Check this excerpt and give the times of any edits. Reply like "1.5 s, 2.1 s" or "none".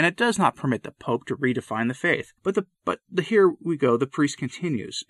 2.4 s, 2.7 s